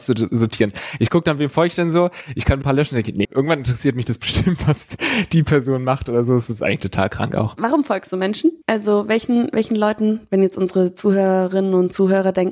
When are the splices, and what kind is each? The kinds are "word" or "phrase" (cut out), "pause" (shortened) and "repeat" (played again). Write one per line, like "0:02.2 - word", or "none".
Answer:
0:02.6 - phrase
0:03.2 - word
0:08.6 - pause